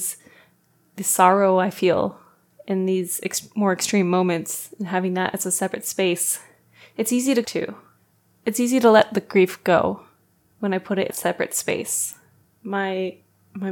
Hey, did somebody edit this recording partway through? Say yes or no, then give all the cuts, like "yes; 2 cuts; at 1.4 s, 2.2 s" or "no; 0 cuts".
yes; 3 cuts; at 2.4 s, 7.4 s, 11.1 s